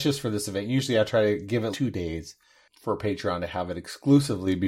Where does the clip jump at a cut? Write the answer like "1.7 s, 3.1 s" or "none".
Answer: 1.7 s